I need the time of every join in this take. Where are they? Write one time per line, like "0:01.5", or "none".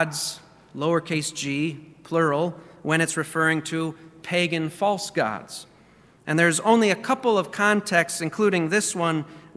none